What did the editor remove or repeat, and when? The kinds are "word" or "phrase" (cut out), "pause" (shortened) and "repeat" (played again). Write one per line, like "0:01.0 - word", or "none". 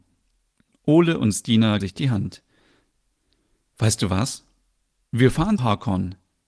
0:01.8 - word
0:05.6 - word